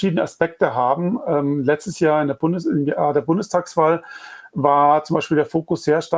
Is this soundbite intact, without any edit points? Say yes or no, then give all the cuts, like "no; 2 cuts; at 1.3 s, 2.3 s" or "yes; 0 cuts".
yes; 0 cuts